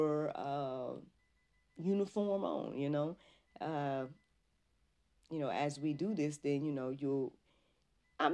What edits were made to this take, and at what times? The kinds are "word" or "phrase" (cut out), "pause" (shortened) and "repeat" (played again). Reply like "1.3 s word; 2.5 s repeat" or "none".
none